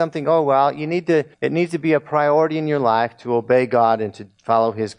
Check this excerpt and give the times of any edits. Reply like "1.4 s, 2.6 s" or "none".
1.3 s